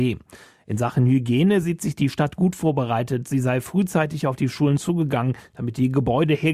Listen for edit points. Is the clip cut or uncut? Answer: uncut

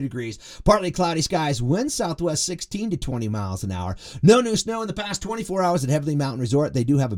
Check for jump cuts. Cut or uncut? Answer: uncut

